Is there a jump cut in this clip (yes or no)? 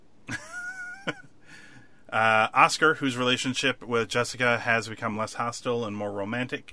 no